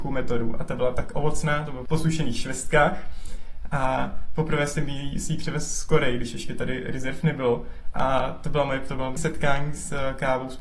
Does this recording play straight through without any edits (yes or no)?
no